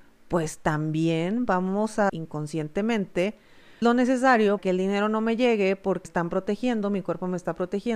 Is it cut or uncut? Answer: cut